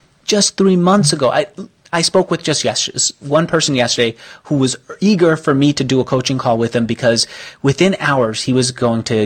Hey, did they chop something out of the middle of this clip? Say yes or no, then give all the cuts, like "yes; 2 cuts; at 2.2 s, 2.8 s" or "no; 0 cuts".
no; 0 cuts